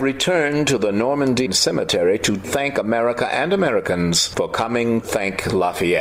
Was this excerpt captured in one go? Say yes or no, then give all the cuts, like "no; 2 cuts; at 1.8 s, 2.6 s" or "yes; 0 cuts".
no; 3 cuts; at 1.5 s, 2.4 s, 5.0 s